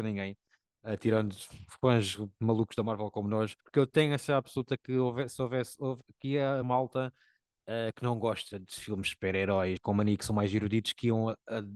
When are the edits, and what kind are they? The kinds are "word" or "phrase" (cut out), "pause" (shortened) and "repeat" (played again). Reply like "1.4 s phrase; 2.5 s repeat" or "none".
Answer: 3.6 s pause; 6.6 s word; 9.8 s word